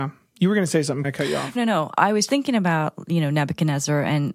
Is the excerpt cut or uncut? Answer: cut